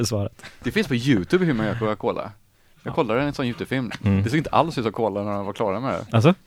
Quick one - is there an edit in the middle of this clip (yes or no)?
no